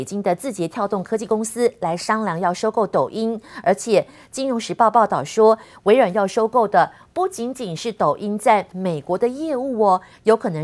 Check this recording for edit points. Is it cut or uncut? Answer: uncut